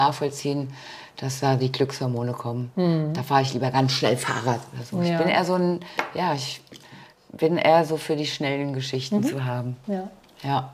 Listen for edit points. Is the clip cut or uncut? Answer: uncut